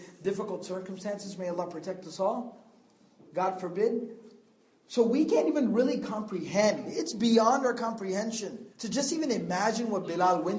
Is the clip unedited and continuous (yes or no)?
no